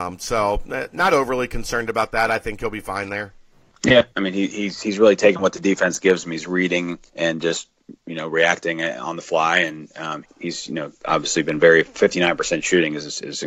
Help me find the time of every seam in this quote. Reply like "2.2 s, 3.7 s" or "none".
4.1 s, 7.1 s, 10.2 s